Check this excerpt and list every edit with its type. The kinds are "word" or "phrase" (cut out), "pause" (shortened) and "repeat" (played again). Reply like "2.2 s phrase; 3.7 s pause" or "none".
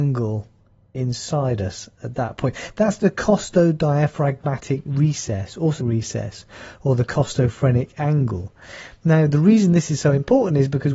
5.8 s phrase